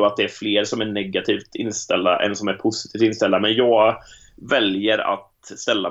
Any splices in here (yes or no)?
no